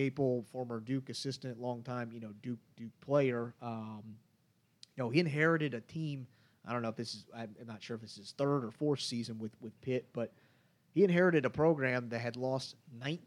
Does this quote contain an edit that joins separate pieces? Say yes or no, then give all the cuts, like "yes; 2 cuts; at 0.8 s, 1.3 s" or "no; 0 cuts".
no; 0 cuts